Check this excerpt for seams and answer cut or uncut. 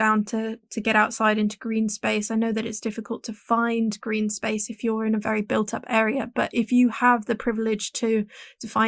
uncut